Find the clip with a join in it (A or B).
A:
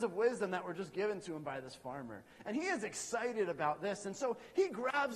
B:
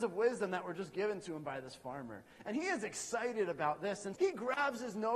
B